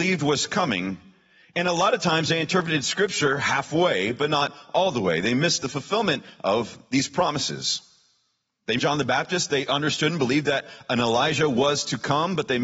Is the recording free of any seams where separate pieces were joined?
no; 1 cut; at 8.8 s

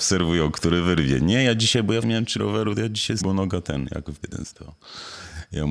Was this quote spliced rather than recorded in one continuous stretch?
yes; 5 cuts; at 2.0 s, 2.4 s, 3.2 s, 4.2 s, 4.5 s

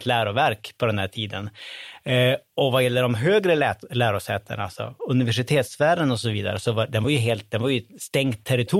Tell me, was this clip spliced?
no; 0 cuts

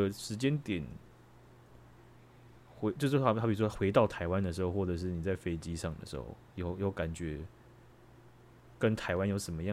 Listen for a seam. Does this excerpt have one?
no; 0 cuts

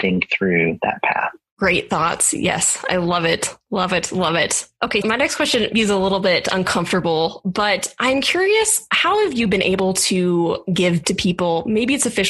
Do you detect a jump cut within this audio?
yes; 3 cuts; at 5.0 s, 5.7 s, 11.0 s

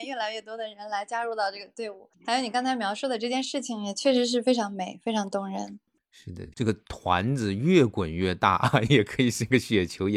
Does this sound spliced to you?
no; 0 cuts

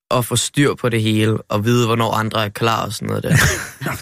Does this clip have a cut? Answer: no; 0 cuts

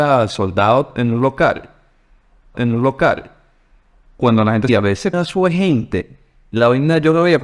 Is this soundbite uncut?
no; 3 cuts; at 2.5 s, 4.7 s, 5.1 s

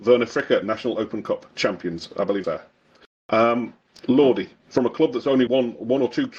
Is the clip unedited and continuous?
no; 2 cuts; at 2.4 s, 5.5 s

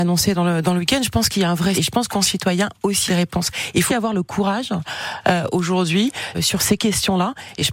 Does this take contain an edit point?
yes; 5 cuts; at 1.7 s, 2.1 s, 3.1 s, 3.9 s, 6.3 s

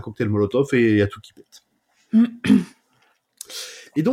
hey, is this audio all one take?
yes; 0 cuts

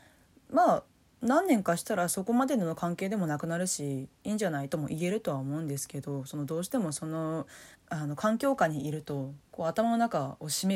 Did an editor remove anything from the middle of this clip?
yes; 2 cuts; at 7.7 s, 9.5 s

